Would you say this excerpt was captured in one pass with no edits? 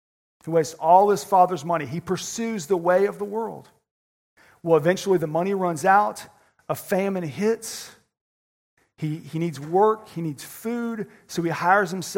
yes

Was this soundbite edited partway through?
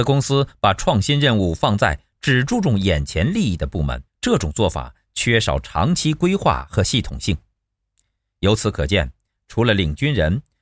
yes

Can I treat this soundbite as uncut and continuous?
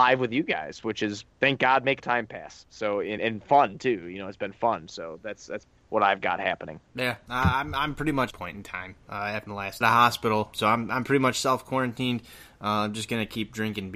no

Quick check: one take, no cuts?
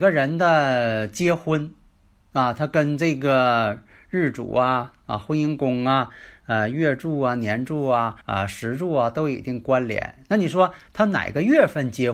no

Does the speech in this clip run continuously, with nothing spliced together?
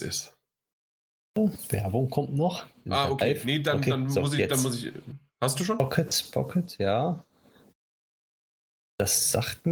yes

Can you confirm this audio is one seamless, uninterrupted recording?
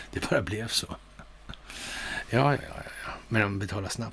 no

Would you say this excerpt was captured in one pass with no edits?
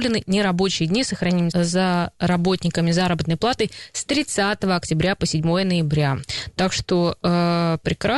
no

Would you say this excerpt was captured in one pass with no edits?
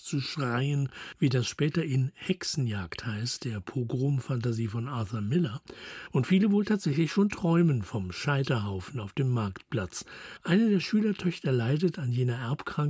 yes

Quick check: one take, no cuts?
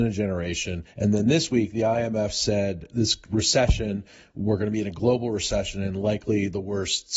no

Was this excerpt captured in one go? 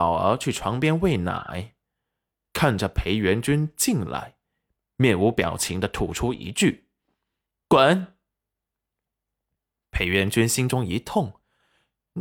yes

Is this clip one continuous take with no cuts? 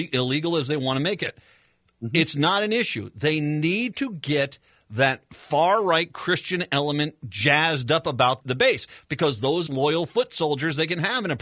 no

